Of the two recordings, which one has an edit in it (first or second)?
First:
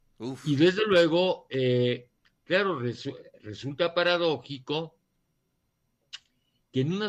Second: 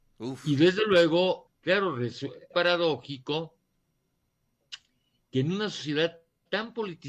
second